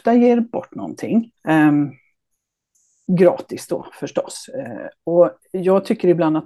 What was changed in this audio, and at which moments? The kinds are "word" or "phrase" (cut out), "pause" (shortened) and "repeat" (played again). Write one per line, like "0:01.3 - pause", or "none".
0:01.4 - pause